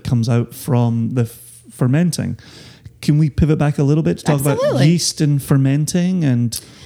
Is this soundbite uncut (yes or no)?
yes